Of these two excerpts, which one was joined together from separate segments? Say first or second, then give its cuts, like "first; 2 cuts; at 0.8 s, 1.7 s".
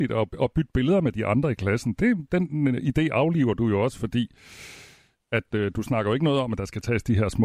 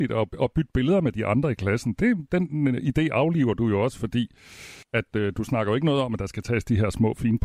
second; 1 cut; at 4.8 s